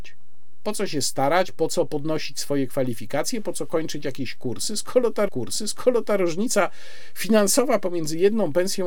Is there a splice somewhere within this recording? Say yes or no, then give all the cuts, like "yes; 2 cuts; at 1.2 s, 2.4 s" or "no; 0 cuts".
yes; 1 cut; at 5.3 s